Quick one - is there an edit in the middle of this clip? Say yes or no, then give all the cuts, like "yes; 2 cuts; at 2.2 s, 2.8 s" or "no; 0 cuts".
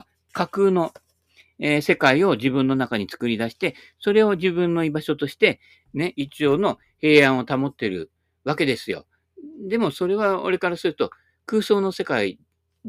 no; 0 cuts